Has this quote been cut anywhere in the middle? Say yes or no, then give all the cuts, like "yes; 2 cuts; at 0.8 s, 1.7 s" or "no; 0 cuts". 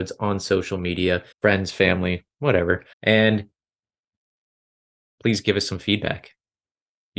yes; 2 cuts; at 1.3 s, 2.9 s